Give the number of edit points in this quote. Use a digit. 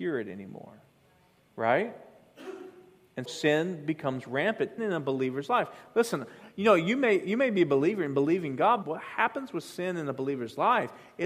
3